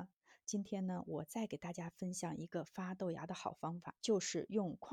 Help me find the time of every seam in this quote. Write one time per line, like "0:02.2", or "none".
0:04.0